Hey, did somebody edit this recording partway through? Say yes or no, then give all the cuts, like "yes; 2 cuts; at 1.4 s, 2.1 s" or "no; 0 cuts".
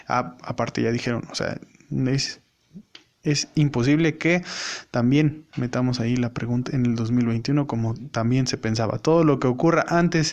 yes; 2 cuts; at 5.5 s, 6.7 s